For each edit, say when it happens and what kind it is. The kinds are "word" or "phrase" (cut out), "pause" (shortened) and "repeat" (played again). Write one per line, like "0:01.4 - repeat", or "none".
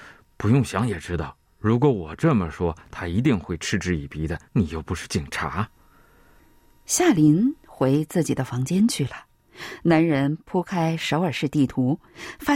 0:04.5 - pause